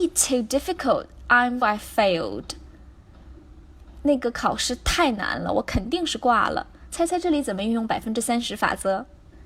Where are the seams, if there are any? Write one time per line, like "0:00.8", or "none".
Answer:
0:01.6